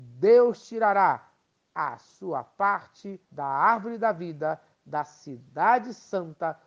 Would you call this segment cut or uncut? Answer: cut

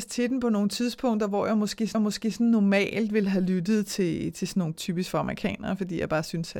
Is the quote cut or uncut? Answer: cut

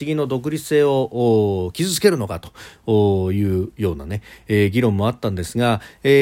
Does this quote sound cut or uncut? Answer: uncut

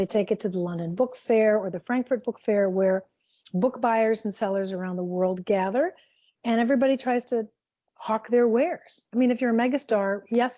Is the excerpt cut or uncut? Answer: uncut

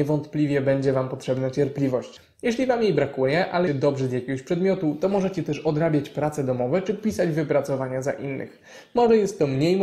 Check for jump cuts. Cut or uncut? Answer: cut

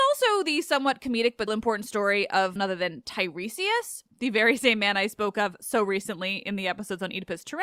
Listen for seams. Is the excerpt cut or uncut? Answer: cut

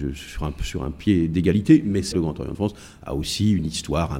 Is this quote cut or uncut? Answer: cut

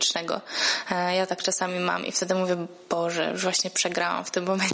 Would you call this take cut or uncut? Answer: uncut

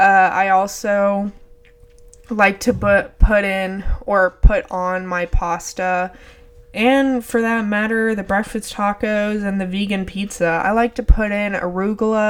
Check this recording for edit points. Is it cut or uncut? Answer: uncut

